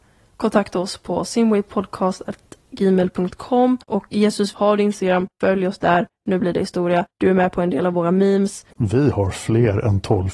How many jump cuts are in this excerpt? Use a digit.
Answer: 3